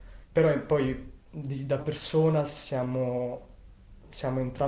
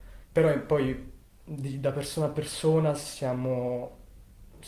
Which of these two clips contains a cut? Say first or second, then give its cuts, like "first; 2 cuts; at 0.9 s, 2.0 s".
first; 2 cuts; at 1.2 s, 1.8 s